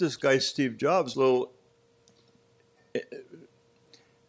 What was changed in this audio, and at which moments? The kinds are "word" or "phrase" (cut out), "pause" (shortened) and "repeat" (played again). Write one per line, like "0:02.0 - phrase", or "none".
0:01.1 - phrase